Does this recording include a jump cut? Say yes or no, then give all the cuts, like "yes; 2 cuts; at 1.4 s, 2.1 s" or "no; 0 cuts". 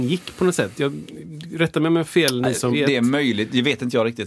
yes; 1 cut; at 2.7 s